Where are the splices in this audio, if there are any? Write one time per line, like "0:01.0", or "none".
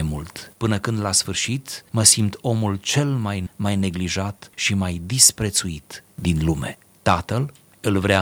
0:03.5